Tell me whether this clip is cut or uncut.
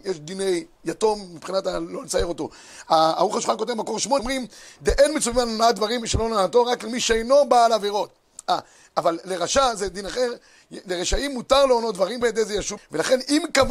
cut